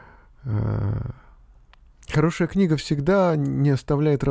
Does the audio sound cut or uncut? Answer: uncut